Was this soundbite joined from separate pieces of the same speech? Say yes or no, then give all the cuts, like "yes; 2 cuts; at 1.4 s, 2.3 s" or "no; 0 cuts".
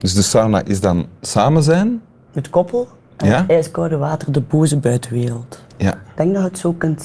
no; 0 cuts